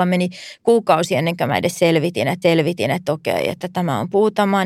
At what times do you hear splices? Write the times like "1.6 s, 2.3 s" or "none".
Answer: 2.4 s